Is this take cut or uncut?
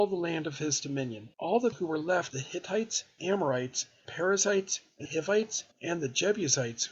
cut